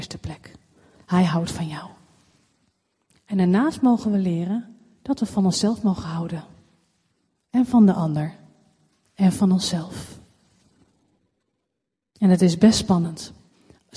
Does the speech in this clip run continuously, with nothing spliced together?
yes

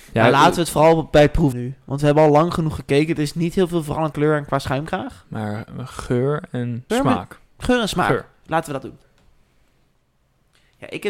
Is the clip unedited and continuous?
no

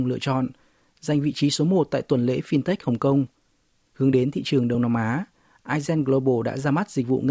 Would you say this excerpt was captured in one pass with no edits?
yes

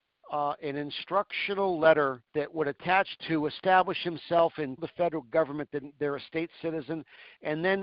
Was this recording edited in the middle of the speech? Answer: yes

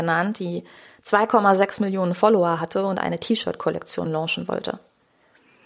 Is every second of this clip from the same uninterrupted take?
yes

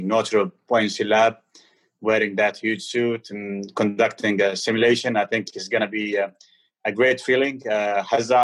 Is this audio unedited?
yes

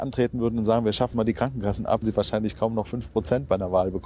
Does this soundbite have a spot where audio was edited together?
yes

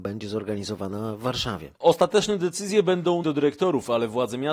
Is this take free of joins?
no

